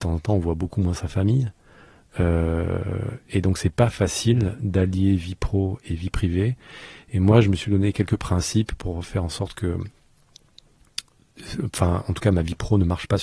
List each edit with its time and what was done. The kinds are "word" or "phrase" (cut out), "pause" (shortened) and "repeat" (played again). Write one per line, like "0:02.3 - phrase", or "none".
none